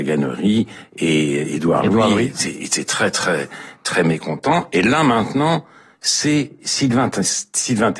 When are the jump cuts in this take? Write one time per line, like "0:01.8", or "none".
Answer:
none